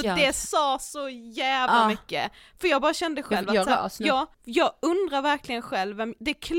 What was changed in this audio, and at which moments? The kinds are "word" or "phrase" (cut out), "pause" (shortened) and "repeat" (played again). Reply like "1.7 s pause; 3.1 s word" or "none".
4.3 s pause